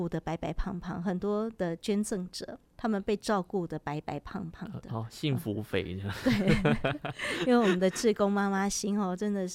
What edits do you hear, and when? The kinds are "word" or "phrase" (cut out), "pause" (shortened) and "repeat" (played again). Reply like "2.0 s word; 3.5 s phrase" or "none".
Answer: none